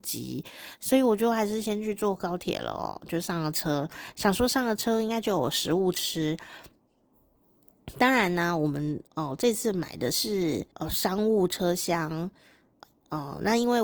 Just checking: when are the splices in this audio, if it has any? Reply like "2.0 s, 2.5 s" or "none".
9.1 s, 10.7 s